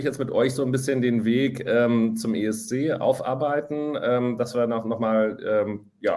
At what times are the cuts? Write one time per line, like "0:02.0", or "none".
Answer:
none